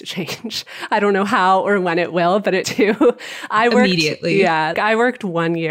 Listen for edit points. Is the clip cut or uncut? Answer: cut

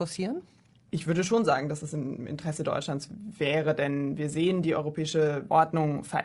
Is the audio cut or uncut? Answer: uncut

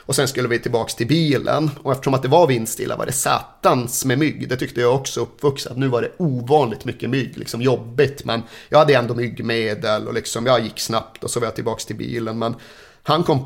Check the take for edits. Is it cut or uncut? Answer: uncut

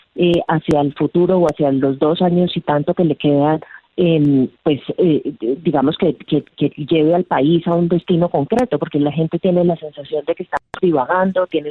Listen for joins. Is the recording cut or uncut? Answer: uncut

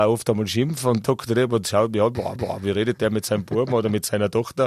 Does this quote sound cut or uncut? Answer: cut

